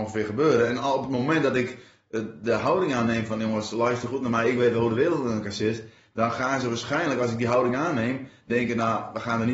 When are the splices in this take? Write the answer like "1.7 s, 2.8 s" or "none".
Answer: none